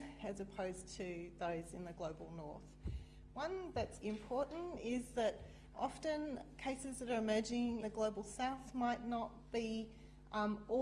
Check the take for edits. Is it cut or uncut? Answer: cut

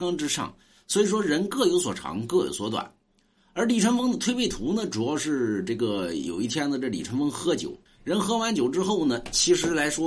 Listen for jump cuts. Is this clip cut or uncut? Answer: cut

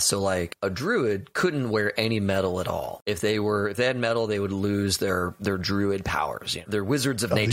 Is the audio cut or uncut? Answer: uncut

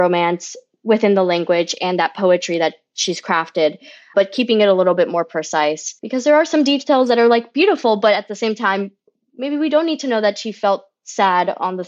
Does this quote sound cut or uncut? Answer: uncut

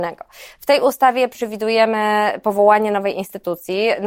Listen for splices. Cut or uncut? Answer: uncut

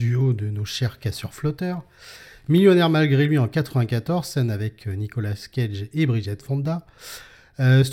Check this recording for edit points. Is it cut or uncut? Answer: uncut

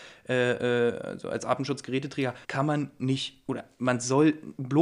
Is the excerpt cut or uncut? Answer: cut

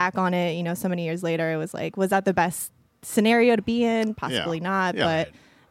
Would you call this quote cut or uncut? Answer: uncut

